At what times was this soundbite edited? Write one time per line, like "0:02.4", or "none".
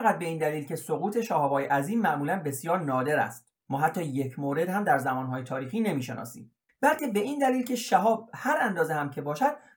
0:03.6
0:06.7